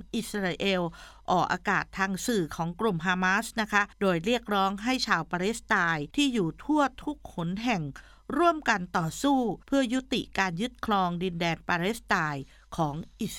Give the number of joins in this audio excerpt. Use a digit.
3